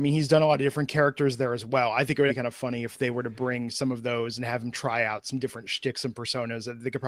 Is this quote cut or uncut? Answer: cut